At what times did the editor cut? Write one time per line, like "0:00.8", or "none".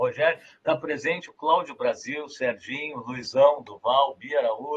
none

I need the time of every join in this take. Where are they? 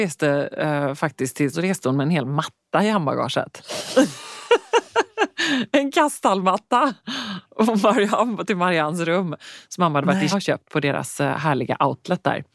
0:01.5
0:10.3

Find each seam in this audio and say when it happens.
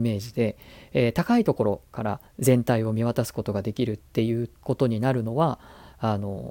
0:02.3
0:04.1
0:04.6

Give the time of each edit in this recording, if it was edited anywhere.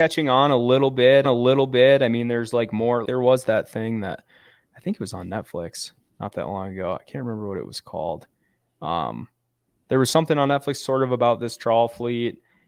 0:01.2
0:03.0

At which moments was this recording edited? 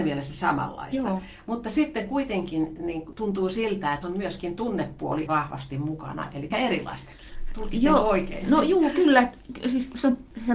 0:04.0
0:05.3
0:06.5

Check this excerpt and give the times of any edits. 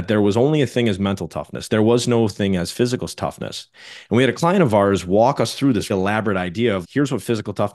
0:05.9
0:06.8

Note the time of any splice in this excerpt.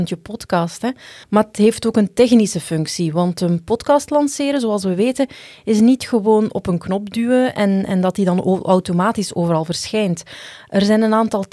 0:01.2

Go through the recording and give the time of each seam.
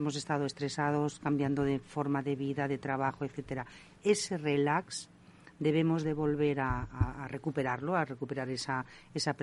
none

